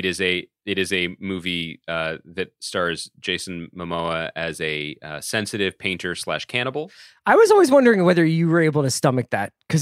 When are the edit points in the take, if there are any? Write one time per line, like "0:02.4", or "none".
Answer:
none